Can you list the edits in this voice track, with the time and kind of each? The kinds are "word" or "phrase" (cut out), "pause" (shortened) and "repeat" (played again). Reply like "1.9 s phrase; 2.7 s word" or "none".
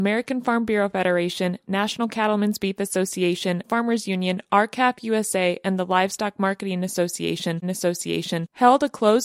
3.6 s word; 7.6 s repeat